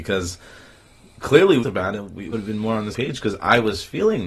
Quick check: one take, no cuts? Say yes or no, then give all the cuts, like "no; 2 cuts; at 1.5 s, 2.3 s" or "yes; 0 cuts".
no; 3 cuts; at 1.6 s, 2.3 s, 2.9 s